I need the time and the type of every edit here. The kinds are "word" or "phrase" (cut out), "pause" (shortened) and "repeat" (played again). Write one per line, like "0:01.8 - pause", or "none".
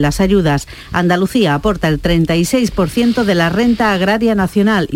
none